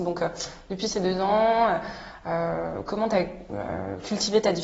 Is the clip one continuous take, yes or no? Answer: yes